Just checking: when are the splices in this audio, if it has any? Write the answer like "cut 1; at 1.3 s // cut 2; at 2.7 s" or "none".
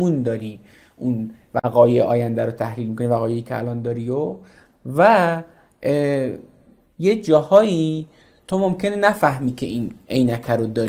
none

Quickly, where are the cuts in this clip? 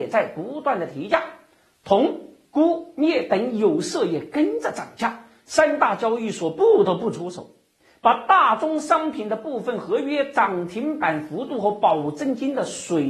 cut 1; at 2.4 s

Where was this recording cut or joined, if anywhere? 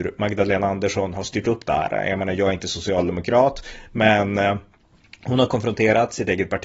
none

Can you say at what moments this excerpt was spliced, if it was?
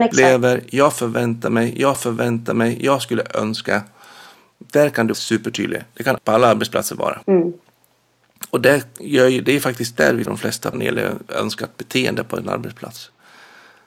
cut 1; at 1.9 s // cut 2; at 5.1 s // cut 3; at 6.2 s // cut 4; at 7.2 s // cut 5; at 10.3 s // cut 6; at 10.7 s

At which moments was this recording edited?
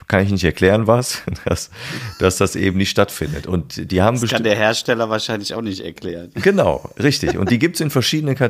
none

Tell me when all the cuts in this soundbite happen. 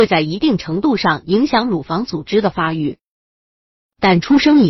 none

